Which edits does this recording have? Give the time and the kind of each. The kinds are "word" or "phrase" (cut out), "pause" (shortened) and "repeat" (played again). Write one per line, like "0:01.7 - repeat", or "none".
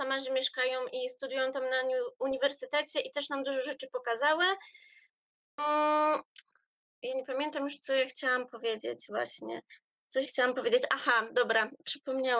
0:10.2 - word